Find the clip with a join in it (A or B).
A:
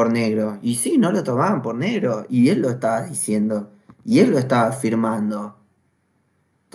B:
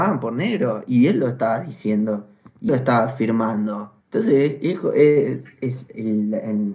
B